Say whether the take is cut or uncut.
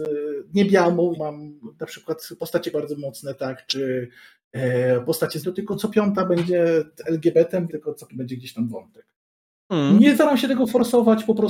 cut